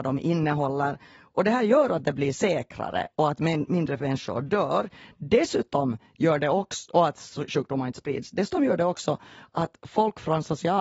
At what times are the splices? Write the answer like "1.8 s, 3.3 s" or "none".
none

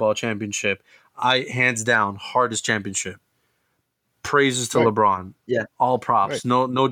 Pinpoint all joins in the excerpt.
none

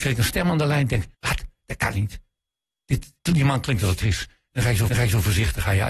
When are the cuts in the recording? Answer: 1.1 s, 3.3 s, 4.0 s, 4.9 s

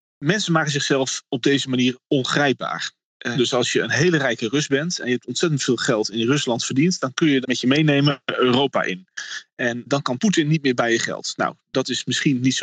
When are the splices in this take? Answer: 3.3 s, 7.4 s, 9.9 s

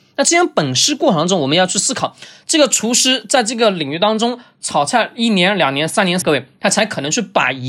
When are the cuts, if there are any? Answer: 6.2 s

